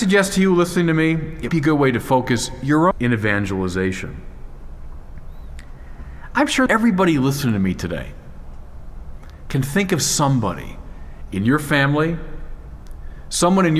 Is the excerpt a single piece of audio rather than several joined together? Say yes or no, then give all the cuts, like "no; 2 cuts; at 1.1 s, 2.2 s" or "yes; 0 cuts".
no; 3 cuts; at 1.5 s, 2.9 s, 6.7 s